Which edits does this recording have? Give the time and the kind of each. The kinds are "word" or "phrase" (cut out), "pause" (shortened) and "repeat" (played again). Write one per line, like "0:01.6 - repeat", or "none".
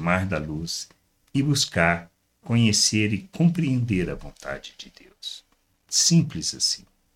none